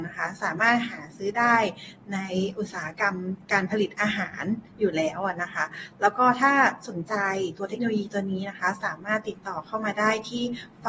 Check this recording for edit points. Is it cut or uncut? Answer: cut